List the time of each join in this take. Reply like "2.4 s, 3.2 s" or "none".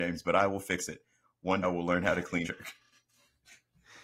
1.6 s, 2.4 s